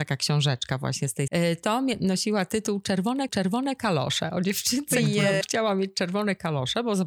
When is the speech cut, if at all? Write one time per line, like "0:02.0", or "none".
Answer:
0:01.3
0:03.3
0:05.4